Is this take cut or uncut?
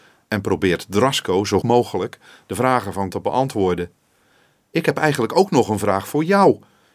cut